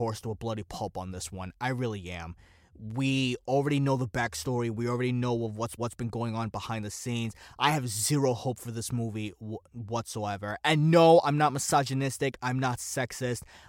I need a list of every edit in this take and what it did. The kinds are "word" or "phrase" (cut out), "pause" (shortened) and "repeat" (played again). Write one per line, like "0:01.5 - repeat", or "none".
0:05.8 - phrase